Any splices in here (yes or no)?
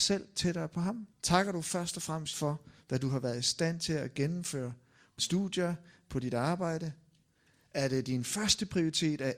yes